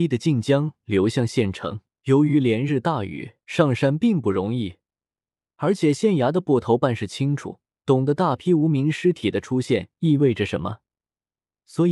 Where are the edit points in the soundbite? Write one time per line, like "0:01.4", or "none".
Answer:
0:01.9
0:03.4
0:07.6